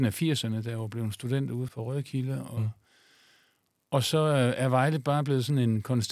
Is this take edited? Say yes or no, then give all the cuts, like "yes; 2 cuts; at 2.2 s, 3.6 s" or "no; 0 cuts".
yes; 1 cut; at 1.7 s